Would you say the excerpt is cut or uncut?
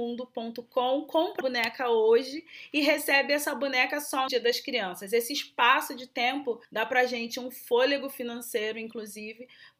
cut